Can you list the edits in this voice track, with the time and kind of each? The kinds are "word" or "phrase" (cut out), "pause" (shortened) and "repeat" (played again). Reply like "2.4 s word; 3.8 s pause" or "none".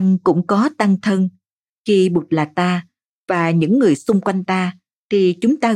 none